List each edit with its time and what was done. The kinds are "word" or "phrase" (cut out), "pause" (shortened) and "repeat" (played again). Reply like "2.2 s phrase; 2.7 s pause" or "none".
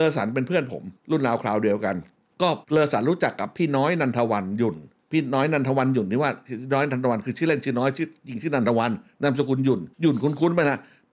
1.0 s pause; 2.2 s pause; 2.6 s pause; 5.0 s pause; 9.9 s pause